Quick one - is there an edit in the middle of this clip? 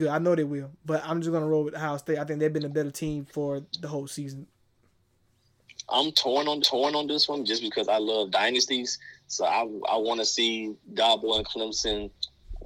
yes; 2 cuts; at 6.6 s, 10.8 s

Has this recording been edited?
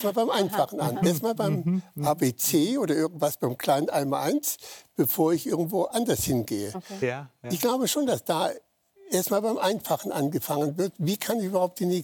no; 0 cuts

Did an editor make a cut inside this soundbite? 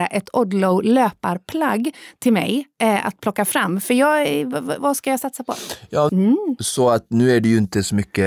yes; 2 cuts; at 4.8 s, 6.1 s

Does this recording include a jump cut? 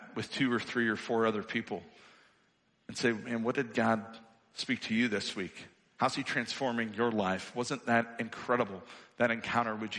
no; 0 cuts

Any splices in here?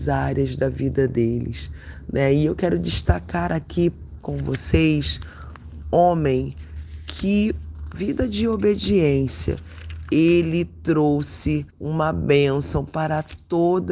yes; 3 cuts; at 5.8 s, 7.9 s, 11.7 s

